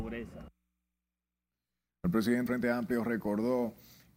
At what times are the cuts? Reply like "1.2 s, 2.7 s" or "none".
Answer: 2.5 s